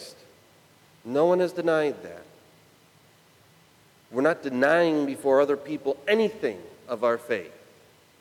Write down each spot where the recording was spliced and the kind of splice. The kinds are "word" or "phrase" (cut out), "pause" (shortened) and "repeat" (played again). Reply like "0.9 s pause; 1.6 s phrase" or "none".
none

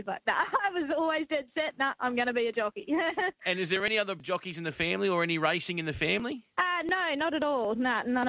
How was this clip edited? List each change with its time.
4.2 s word; 6.5 s pause

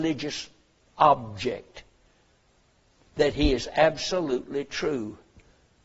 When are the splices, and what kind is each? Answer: none

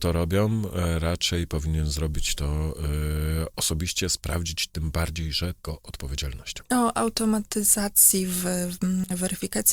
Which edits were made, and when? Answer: 5.6 s phrase

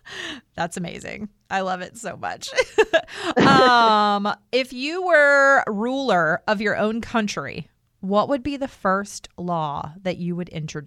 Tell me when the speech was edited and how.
none

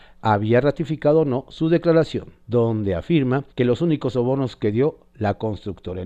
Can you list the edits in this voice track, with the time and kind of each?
2.4 s pause; 3.5 s pause

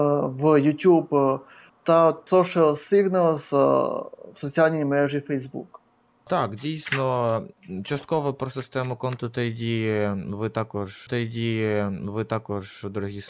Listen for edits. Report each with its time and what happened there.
2.3 s word; 11.1 s repeat

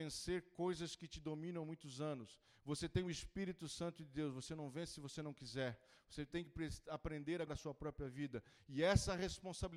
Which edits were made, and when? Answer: 7.5 s word

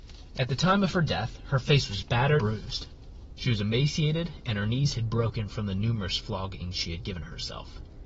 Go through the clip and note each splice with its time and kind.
2.4 s word

